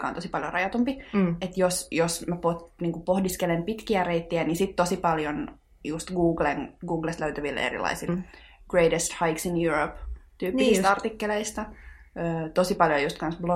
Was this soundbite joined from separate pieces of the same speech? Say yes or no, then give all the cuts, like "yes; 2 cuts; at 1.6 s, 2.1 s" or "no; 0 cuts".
yes; 1 cut; at 8.1 s